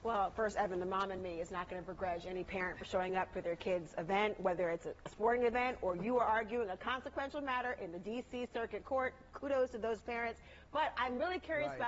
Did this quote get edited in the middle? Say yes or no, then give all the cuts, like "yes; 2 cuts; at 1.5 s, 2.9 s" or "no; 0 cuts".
no; 0 cuts